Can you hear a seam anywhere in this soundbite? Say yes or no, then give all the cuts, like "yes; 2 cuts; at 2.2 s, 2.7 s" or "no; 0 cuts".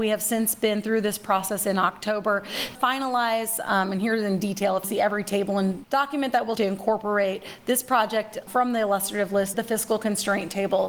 yes; 6 cuts; at 2.7 s, 4.8 s, 5.8 s, 6.6 s, 8.5 s, 9.5 s